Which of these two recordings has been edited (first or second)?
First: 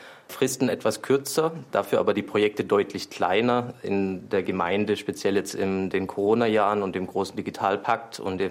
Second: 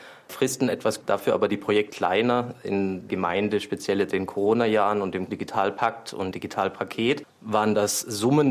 second